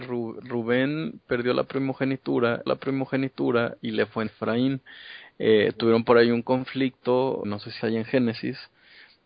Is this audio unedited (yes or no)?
no